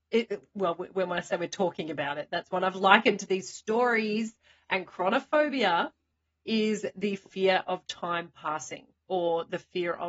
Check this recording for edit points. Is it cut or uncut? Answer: uncut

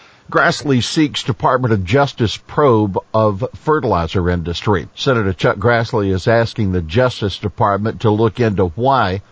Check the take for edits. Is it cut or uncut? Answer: cut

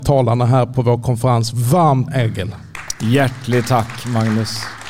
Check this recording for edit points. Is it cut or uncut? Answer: cut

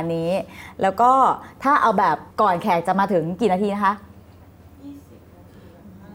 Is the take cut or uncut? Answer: cut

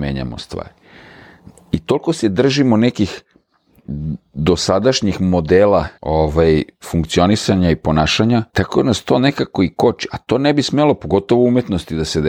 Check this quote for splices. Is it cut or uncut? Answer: cut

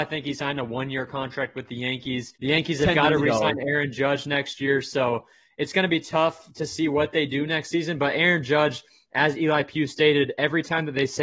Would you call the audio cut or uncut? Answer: cut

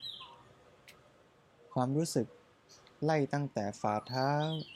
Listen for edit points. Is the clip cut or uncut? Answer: uncut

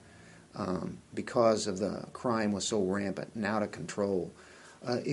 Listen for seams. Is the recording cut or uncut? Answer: uncut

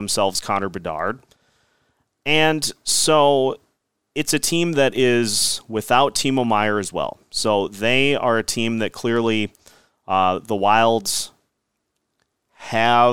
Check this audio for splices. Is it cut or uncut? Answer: uncut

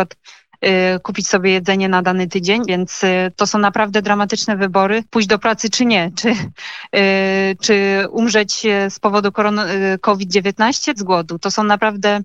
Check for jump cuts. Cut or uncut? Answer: cut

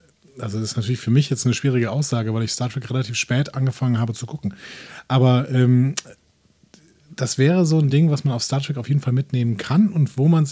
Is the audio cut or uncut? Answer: uncut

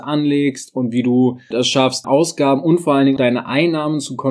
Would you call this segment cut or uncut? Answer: cut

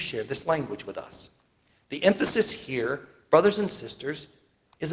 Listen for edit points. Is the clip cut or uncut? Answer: uncut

